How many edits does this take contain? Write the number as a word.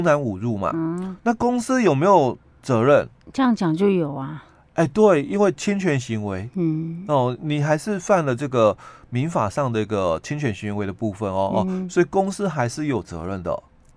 one